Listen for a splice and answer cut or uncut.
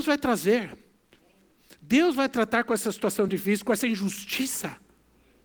uncut